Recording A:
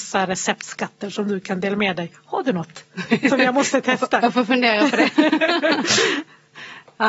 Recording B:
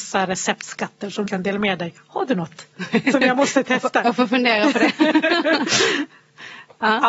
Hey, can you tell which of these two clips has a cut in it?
B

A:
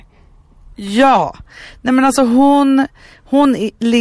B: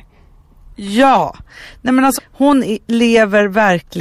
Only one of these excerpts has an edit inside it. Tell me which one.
B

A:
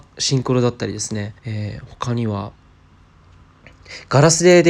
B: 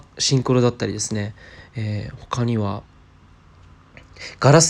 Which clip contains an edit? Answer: A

